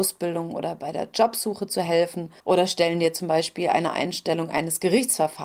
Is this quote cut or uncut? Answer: cut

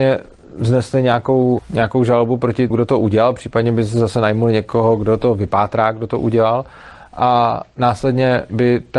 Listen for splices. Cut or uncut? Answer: cut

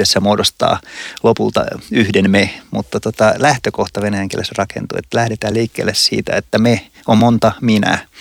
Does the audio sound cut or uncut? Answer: uncut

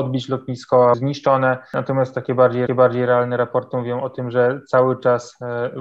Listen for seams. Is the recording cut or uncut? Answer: cut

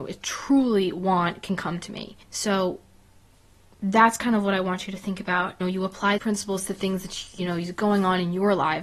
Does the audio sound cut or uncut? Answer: cut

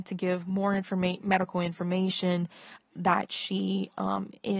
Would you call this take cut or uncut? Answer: uncut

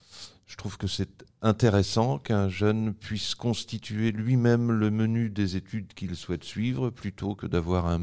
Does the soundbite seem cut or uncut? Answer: uncut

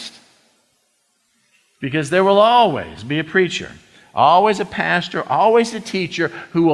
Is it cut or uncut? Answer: uncut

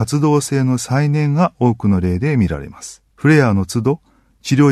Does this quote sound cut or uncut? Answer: cut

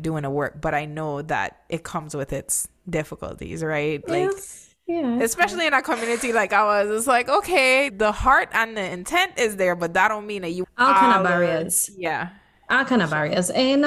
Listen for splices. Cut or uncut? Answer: cut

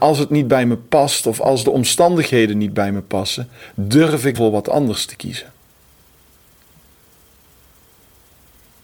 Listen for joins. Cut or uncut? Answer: cut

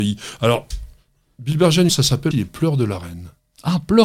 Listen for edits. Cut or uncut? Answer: cut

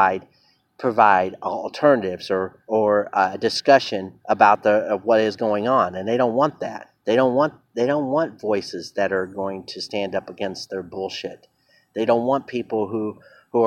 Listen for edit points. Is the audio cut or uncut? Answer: cut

